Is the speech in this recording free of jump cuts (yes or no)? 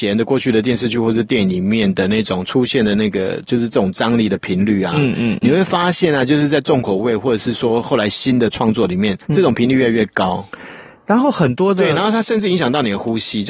no